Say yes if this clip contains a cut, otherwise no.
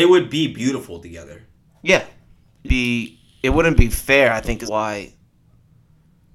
yes